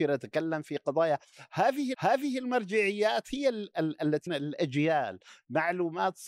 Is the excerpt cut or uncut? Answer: cut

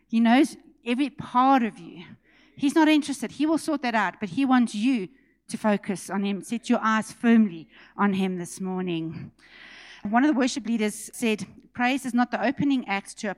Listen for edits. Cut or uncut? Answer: uncut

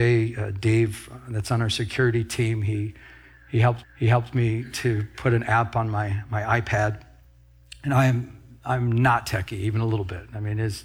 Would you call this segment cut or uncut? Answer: cut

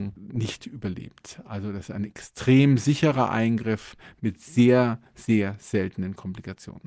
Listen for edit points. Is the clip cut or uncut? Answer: uncut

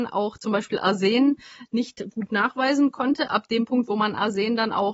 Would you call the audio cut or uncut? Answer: uncut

